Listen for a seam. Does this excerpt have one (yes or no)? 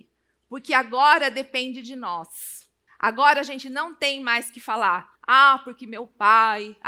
yes